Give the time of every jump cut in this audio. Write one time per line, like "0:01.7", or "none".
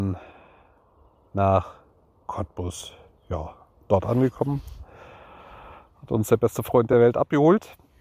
none